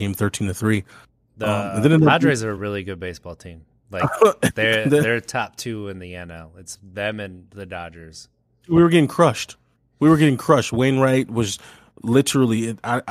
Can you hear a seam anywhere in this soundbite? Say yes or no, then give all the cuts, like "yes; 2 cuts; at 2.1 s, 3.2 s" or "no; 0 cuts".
no; 0 cuts